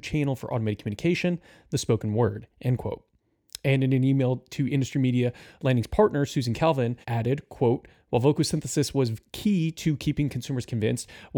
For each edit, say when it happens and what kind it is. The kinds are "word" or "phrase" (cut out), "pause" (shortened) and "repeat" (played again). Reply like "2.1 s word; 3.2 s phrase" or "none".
7.0 s pause